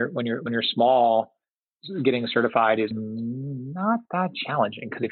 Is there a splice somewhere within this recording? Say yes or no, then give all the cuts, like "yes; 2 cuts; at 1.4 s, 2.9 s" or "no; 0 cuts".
yes; 1 cut; at 2.9 s